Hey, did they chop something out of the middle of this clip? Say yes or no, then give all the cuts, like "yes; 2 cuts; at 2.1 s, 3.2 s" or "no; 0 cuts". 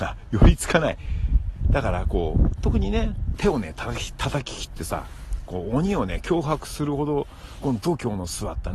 yes; 1 cut; at 3.4 s